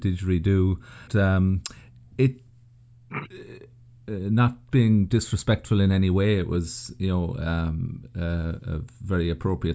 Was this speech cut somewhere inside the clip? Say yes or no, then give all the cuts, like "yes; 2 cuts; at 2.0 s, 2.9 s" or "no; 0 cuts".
yes; 1 cut; at 1.1 s